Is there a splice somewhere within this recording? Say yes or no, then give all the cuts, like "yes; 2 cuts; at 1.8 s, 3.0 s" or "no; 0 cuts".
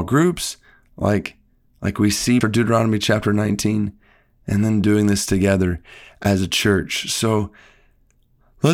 yes; 1 cut; at 2.4 s